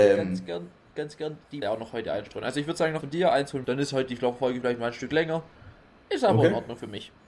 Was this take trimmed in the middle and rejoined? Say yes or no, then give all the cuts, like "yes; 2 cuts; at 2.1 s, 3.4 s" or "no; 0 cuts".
yes; 3 cuts; at 1.6 s, 3.0 s, 3.6 s